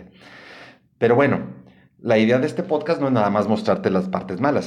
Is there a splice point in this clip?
no; 0 cuts

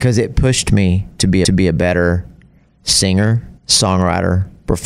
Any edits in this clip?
yes; 2 cuts; at 1.4 s, 3.6 s

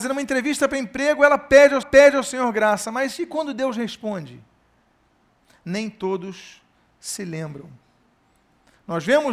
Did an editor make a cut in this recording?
yes; 1 cut; at 1.8 s

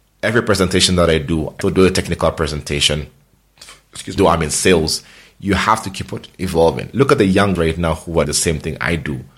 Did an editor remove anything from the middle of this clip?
yes; 4 cuts; at 1.6 s, 4.2 s, 7.6 s, 8.3 s

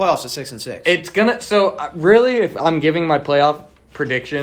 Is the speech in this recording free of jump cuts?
yes; 0 cuts

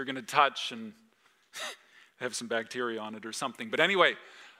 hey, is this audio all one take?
yes; 0 cuts

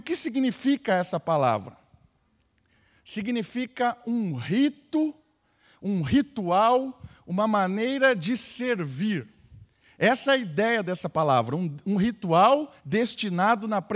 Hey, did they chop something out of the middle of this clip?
yes; 1 cut; at 12.8 s

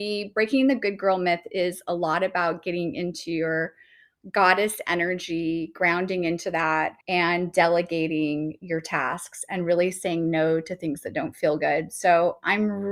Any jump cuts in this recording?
yes; 1 cut; at 7.0 s

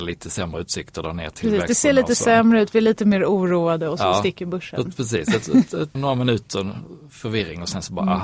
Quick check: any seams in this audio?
yes; 1 cut; at 5.9 s

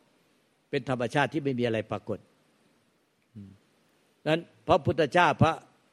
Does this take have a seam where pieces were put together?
no; 0 cuts

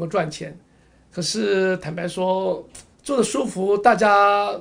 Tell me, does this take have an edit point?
yes; 1 cut; at 2.9 s

